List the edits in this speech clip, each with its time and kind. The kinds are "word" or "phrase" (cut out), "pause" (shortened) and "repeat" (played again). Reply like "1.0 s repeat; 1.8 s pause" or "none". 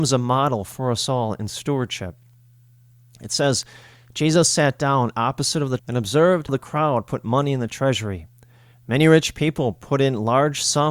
5.8 s word; 6.5 s word